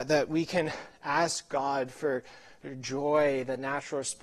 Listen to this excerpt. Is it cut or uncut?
uncut